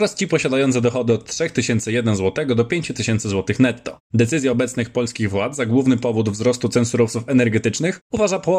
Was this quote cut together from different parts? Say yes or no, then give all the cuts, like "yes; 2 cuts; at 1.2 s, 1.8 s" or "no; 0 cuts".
no; 0 cuts